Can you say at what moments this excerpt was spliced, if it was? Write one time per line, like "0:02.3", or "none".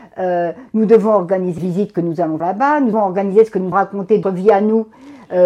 0:01.6
0:02.4
0:02.9
0:03.7
0:04.2

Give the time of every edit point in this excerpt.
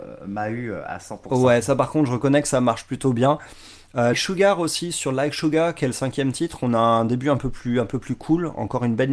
0:04.1

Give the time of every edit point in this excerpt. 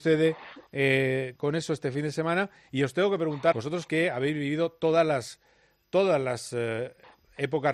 0:01.3
0:03.5

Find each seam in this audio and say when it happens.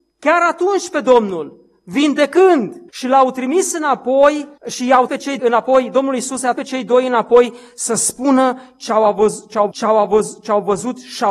0:02.9
0:04.6
0:05.1
0:05.4
0:06.6
0:09.7

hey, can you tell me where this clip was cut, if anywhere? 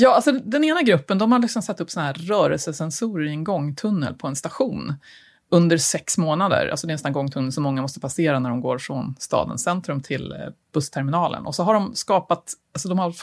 none

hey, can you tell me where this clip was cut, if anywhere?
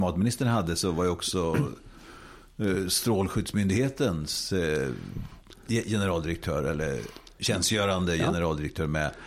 0:07.4

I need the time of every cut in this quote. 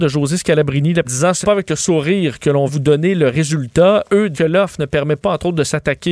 0:01.0
0:01.4
0:02.7
0:04.3

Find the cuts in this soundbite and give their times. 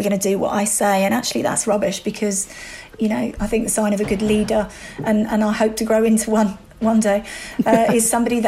none

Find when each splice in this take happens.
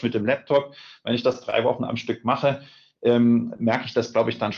none

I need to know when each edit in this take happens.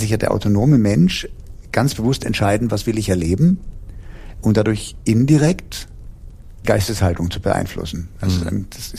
0:06.6

